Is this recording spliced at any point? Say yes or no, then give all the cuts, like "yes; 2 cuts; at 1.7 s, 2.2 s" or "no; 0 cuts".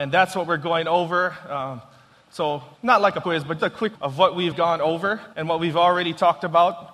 yes; 6 cuts; at 2.7 s, 3.2 s, 3.6 s, 3.9 s, 4.5 s, 5.3 s